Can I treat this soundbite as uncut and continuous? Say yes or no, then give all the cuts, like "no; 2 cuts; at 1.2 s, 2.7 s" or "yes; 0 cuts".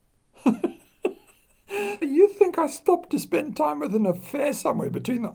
no; 2 cuts; at 2.0 s, 3.1 s